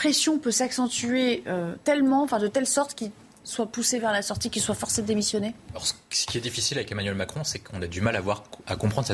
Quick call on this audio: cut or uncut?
uncut